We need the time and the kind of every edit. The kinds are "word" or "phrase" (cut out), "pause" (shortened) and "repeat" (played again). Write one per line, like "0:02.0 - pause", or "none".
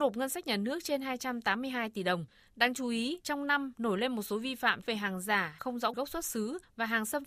0:05.6 - word
0:05.9 - word